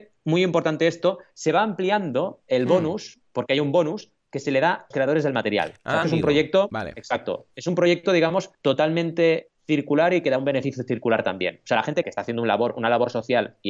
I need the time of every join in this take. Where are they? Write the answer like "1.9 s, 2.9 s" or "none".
4.9 s, 6.0 s, 8.5 s, 12.0 s